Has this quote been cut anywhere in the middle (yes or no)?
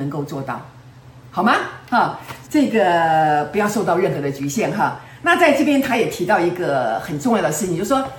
yes